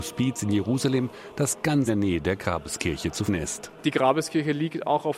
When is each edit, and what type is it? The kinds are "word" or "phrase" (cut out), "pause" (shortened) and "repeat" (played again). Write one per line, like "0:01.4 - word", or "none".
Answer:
0:01.9 - word
0:03.3 - word